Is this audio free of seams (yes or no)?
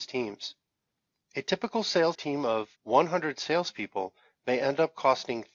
no